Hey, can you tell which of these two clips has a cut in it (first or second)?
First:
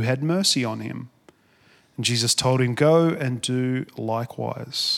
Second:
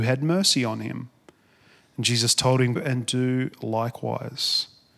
second